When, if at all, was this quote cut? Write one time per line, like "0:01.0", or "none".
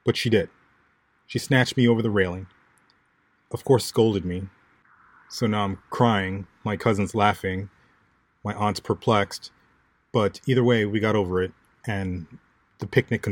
none